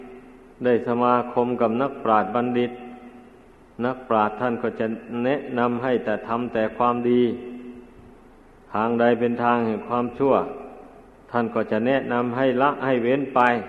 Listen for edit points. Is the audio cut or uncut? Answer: uncut